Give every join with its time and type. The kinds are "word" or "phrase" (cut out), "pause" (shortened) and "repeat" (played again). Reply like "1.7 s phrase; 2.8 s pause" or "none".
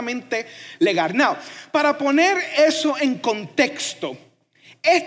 none